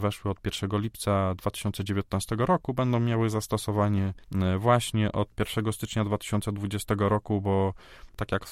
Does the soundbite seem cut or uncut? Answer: uncut